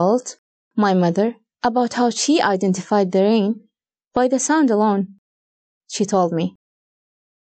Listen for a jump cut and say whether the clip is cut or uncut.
uncut